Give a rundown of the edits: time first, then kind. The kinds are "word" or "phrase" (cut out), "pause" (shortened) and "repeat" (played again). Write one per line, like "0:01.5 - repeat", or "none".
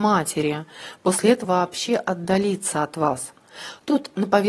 0:01.4 - word